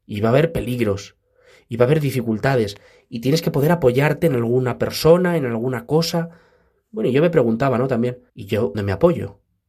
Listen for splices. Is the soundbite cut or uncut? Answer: cut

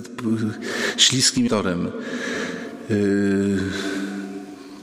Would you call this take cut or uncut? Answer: cut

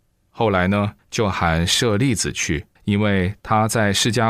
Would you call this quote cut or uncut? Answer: cut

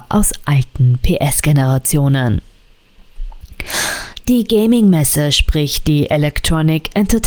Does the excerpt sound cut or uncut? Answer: uncut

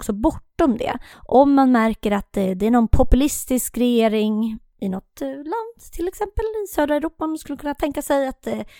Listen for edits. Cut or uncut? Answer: cut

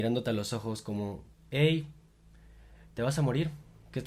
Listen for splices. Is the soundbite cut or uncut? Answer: uncut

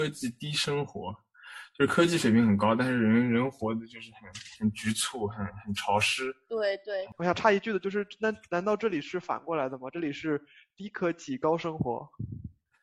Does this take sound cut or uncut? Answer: uncut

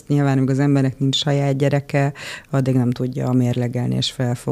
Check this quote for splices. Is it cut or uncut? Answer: uncut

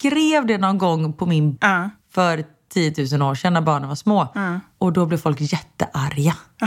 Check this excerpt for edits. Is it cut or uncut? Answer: cut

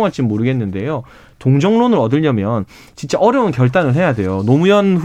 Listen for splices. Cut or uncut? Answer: uncut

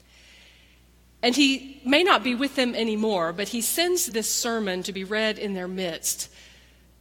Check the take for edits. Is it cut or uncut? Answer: cut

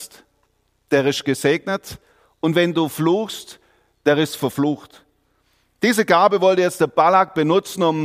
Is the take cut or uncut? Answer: uncut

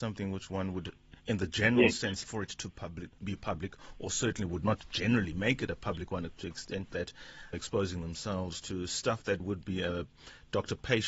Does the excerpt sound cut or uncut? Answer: cut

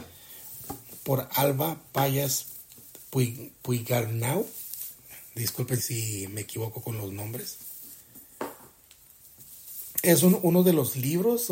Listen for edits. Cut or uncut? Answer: cut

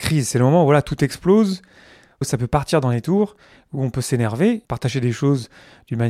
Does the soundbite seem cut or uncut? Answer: cut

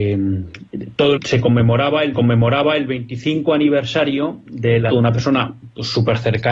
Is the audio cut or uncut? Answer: cut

